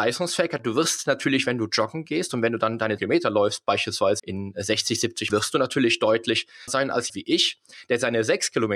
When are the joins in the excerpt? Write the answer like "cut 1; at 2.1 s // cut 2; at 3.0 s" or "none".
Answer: cut 1; at 3.0 s // cut 2; at 4.2 s // cut 3; at 5.3 s // cut 4; at 6.7 s // cut 5; at 7.1 s